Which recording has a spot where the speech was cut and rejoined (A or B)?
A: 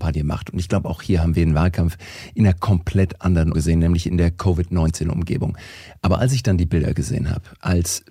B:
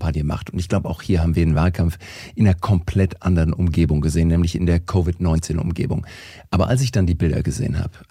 A